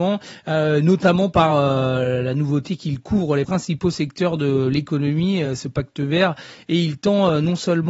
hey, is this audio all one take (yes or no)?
yes